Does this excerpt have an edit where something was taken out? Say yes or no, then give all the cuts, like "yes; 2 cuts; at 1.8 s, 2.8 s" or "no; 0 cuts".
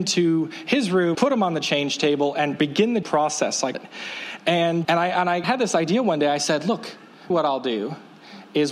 yes; 6 cuts; at 1.1 s, 3.0 s, 3.7 s, 4.8 s, 5.4 s, 7.3 s